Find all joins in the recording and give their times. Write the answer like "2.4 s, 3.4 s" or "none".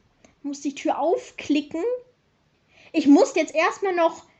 3.3 s